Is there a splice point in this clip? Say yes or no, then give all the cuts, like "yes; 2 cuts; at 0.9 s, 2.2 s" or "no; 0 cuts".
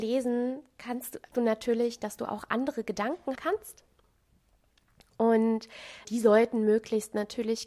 yes; 3 cuts; at 1.3 s, 3.3 s, 6.0 s